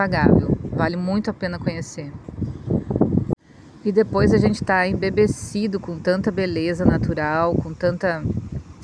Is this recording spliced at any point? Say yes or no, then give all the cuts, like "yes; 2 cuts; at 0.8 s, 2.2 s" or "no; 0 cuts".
no; 0 cuts